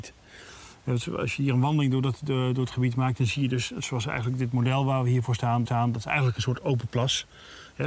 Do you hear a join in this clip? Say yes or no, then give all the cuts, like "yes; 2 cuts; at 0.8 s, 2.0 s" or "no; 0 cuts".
yes; 1 cut; at 5.7 s